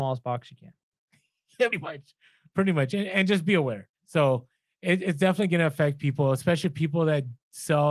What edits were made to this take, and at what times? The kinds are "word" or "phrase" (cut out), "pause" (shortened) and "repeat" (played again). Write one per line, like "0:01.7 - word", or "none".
0:01.7 - word
0:03.9 - pause